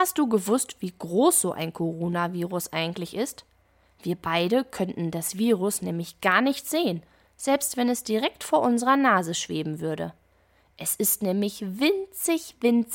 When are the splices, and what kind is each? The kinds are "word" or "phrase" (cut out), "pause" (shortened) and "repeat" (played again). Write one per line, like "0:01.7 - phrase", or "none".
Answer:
none